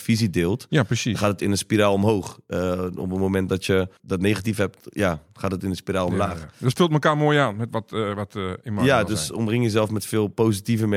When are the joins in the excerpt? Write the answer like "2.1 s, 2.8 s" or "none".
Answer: 4.0 s